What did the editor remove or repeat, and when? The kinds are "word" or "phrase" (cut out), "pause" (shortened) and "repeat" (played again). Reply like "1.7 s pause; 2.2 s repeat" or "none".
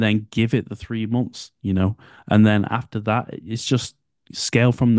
none